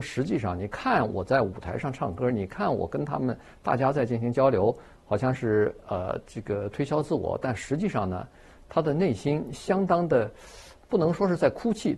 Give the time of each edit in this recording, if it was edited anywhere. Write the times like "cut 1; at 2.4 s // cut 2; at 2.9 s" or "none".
none